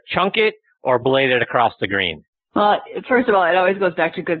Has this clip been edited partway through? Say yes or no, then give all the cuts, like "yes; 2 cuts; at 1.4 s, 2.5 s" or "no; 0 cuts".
yes; 1 cut; at 2.3 s